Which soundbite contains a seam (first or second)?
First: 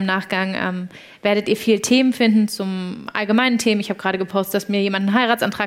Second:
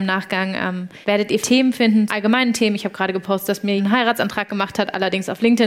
second